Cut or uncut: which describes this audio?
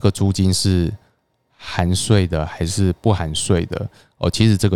uncut